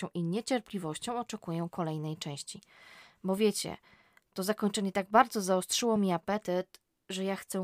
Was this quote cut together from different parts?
no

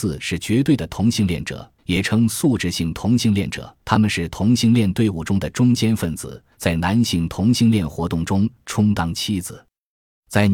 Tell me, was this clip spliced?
yes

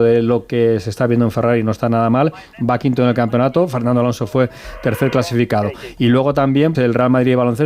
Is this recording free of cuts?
no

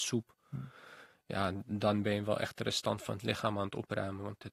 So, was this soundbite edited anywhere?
no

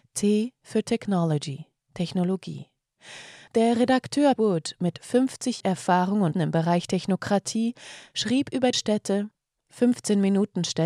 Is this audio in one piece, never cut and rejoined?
no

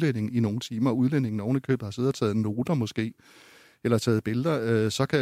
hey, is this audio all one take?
yes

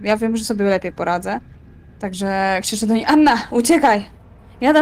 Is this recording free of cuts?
yes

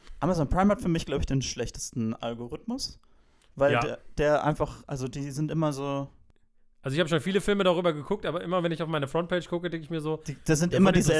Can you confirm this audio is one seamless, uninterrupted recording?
yes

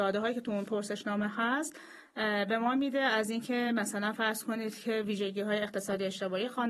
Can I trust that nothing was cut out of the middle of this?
yes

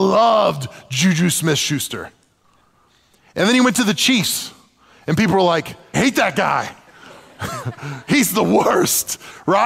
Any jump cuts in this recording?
yes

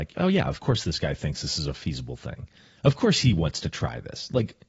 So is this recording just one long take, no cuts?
yes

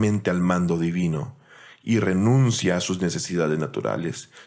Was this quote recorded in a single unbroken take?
yes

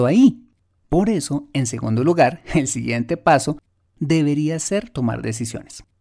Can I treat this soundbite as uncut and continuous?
yes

